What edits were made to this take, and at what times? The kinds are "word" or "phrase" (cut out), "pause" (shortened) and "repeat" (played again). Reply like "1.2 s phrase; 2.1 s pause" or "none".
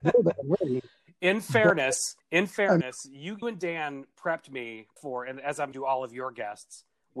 2.2 s pause; 3.4 s word; 5.0 s pause; 5.7 s phrase

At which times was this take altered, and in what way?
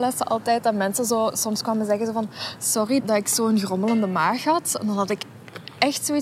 3.0 s word

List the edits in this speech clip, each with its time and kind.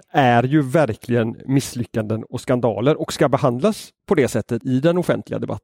4.6 s word

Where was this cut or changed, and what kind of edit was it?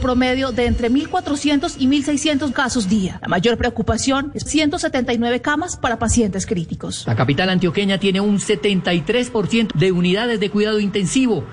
2.5 s word; 4.5 s phrase; 9.7 s phrase

